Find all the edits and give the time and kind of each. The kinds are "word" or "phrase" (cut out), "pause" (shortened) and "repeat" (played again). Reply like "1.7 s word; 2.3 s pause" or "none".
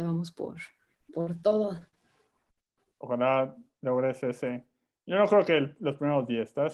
none